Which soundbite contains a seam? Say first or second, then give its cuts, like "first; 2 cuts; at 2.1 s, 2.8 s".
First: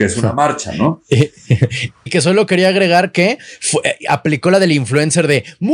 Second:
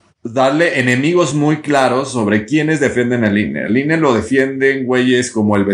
first; 1 cut; at 2.1 s